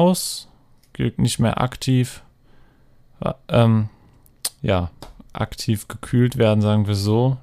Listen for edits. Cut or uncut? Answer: cut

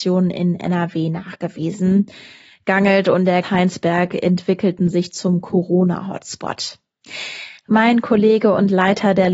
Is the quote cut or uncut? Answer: cut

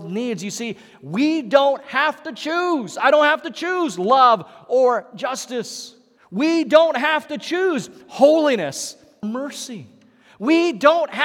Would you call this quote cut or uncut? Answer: cut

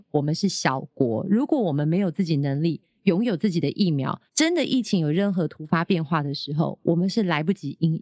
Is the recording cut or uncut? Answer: cut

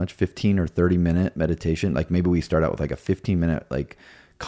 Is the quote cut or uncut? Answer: uncut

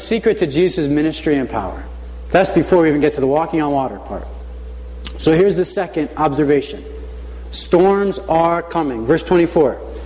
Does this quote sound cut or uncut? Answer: uncut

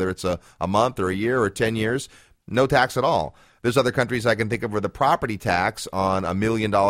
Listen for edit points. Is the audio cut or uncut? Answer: uncut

